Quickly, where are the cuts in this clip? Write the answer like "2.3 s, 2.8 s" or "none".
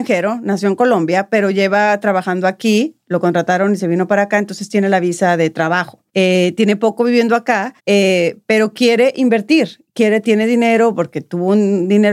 6.1 s, 7.8 s